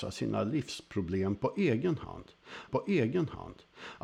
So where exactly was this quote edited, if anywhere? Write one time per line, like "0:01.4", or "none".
0:02.7